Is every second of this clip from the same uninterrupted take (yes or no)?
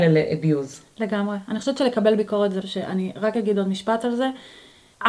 no